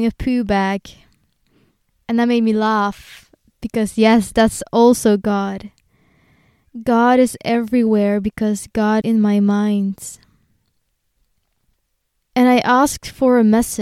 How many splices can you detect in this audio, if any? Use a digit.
1